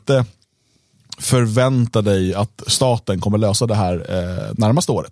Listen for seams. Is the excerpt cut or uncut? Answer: uncut